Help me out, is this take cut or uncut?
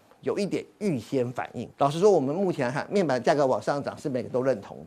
cut